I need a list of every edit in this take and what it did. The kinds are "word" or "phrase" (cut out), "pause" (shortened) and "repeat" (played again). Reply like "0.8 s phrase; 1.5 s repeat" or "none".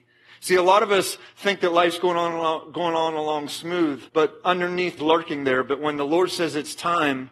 4.1 s pause; 5.0 s phrase